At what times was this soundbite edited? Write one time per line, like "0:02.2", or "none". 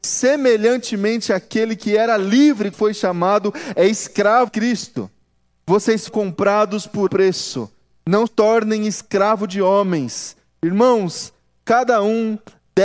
0:02.7
0:04.5
0:06.1
0:07.1
0:08.3